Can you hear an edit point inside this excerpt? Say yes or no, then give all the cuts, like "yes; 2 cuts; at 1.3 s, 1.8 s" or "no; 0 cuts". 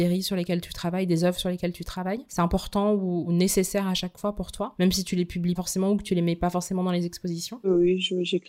yes; 1 cut; at 5.6 s